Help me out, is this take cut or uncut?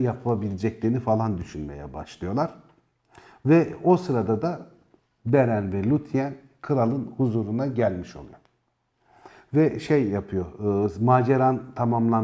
uncut